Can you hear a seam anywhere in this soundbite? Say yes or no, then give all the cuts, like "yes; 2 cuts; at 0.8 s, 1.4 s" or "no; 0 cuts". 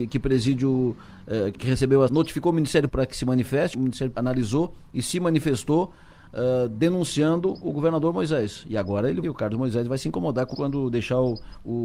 yes; 7 cuts; at 1.5 s, 2.1 s, 2.9 s, 3.7 s, 4.1 s, 9.2 s, 10.5 s